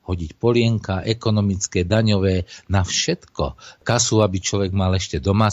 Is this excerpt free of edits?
yes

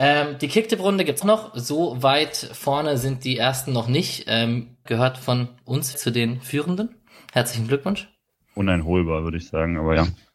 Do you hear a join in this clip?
yes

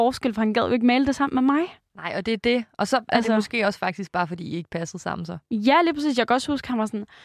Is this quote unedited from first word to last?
yes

